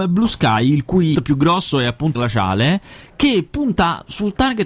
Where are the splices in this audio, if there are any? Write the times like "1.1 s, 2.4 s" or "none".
1.1 s, 2.1 s